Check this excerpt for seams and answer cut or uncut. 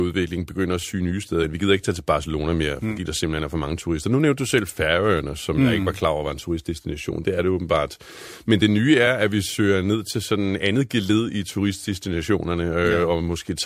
uncut